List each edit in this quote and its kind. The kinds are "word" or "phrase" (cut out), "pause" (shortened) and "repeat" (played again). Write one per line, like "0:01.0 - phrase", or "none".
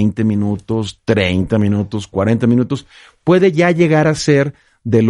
none